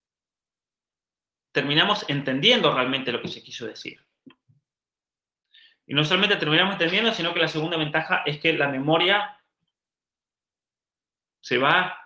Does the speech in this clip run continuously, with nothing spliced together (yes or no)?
yes